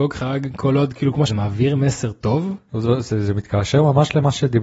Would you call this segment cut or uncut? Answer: cut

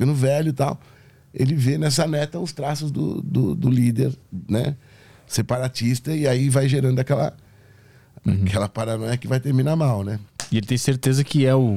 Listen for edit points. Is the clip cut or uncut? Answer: uncut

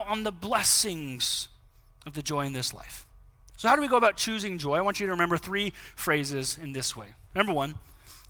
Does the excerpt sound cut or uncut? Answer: uncut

